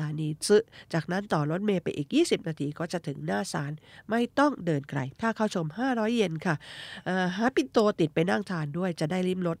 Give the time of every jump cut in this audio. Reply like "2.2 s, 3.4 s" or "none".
5.1 s